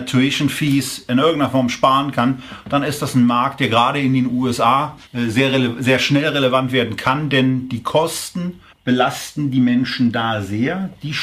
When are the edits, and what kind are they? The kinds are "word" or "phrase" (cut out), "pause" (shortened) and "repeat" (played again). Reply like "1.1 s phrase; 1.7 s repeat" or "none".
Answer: 5.1 s pause; 8.7 s pause